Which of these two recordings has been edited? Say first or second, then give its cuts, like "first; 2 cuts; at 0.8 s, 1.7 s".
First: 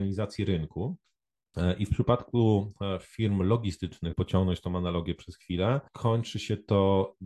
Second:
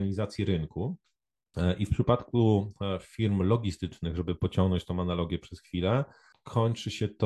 first; 2 cuts; at 4.1 s, 5.9 s